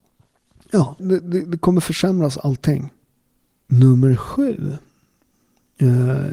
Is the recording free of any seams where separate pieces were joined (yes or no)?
no